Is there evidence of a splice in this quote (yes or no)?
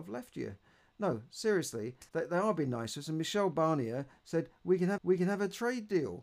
yes